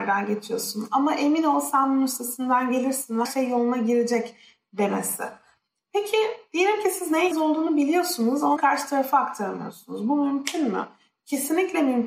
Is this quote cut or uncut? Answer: cut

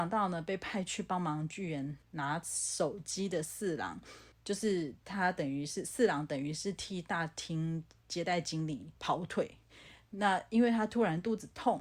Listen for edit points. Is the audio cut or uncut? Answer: cut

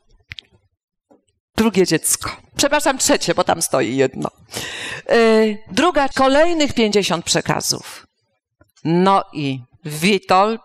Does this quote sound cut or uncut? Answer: cut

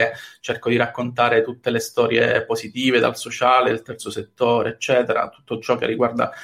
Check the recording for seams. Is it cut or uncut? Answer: uncut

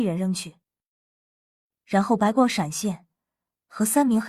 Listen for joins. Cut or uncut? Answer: uncut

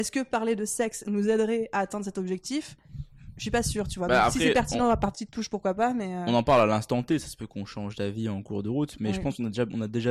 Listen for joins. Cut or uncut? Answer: uncut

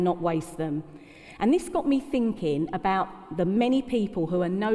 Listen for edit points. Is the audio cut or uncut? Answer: uncut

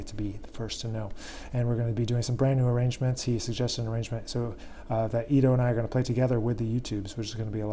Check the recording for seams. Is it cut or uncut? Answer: uncut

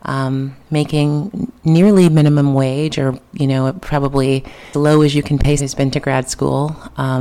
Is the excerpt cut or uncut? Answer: cut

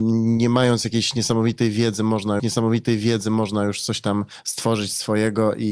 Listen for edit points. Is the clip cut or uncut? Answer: cut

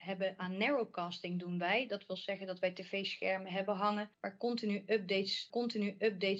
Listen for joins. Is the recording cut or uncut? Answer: cut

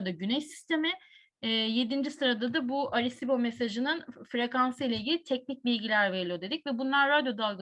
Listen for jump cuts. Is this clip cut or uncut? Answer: uncut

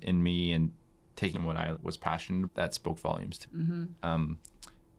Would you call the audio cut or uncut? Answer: cut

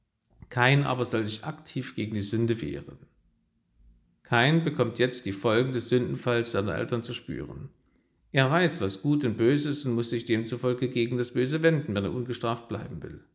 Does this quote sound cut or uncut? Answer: uncut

